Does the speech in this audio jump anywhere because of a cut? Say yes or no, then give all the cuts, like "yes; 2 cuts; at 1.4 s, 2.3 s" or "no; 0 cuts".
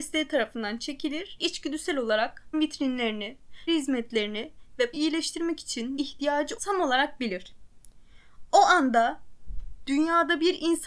yes; 6 cuts; at 1.4 s, 2.5 s, 3.7 s, 4.9 s, 6.0 s, 6.6 s